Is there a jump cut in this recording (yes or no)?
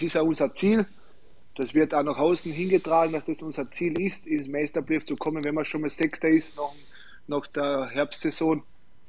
no